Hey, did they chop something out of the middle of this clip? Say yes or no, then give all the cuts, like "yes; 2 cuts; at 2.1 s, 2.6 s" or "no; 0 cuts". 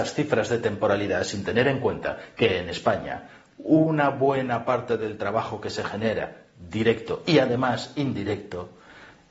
no; 0 cuts